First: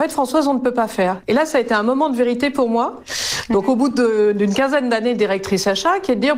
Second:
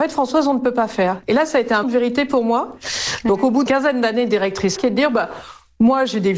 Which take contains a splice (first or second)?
second